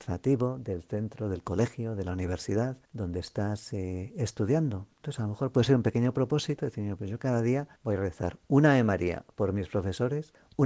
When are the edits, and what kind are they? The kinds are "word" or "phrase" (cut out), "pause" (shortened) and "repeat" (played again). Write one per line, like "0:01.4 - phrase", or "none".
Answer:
0:02.8 - pause
0:07.7 - pause